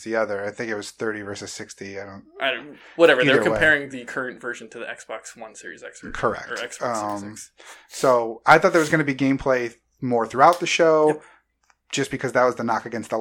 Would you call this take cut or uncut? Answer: uncut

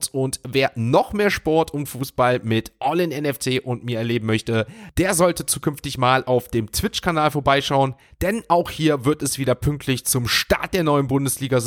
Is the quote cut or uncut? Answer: uncut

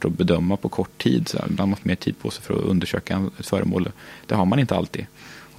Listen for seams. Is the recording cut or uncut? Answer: cut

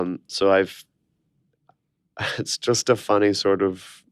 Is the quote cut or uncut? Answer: uncut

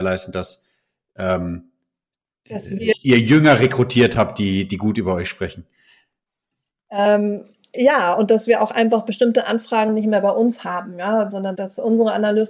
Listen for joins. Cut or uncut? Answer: cut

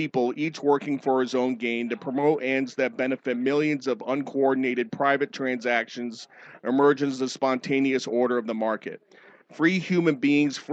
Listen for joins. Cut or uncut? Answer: uncut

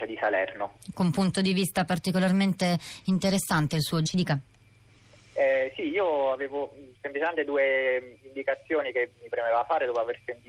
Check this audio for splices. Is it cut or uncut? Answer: cut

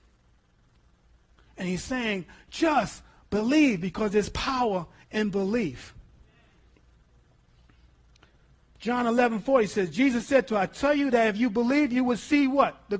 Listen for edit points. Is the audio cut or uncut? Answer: uncut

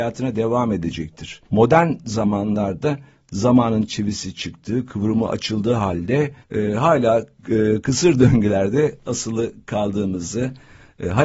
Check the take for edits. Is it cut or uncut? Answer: cut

